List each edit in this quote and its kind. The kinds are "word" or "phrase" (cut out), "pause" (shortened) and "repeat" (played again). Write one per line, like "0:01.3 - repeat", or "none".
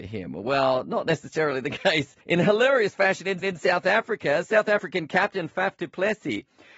0:02.2 - pause
0:03.4 - repeat